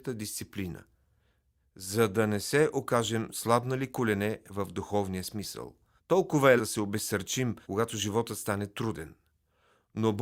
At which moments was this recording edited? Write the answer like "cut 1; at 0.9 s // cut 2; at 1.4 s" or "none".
cut 1; at 3.3 s // cut 2; at 6.0 s // cut 3; at 6.6 s // cut 4; at 7.6 s